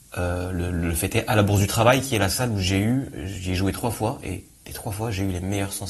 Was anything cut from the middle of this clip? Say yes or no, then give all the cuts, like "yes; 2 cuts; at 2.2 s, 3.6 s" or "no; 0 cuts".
no; 0 cuts